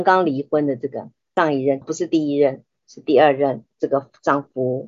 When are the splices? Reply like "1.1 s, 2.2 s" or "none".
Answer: 1.8 s